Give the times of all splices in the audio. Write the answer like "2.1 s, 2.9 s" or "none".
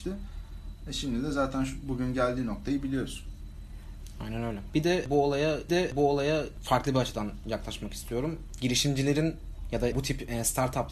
5.7 s, 9.9 s